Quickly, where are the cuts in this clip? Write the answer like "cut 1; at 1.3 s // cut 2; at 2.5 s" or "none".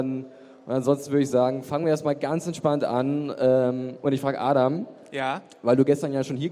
none